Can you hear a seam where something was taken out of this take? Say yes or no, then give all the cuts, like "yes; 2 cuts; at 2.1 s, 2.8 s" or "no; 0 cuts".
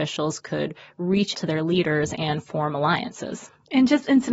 yes; 1 cut; at 1.3 s